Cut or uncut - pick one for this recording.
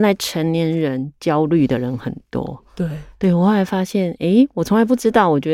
uncut